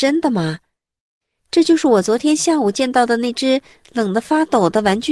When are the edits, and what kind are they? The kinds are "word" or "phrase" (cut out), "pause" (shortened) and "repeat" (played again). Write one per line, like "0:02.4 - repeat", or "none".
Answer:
none